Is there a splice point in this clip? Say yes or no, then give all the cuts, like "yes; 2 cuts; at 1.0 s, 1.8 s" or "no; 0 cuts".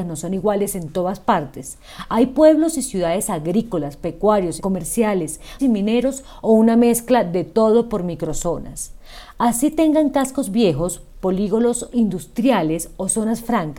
yes; 2 cuts; at 4.6 s, 5.6 s